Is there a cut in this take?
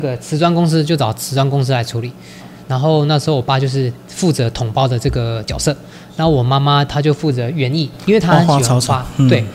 yes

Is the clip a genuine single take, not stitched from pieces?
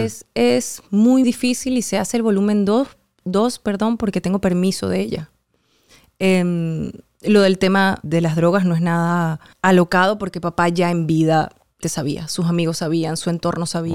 no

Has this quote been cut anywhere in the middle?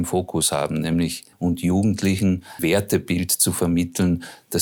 yes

